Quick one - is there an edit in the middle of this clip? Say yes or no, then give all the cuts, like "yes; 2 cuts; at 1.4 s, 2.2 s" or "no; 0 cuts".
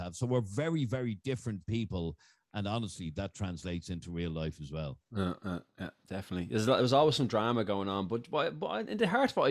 no; 0 cuts